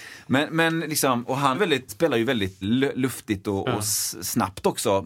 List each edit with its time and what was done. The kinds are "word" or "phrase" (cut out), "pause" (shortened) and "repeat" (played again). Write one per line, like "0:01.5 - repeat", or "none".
0:01.5 - word
0:01.9 - word
0:02.6 - word